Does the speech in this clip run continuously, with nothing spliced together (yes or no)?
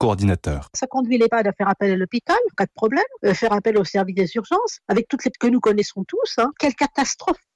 no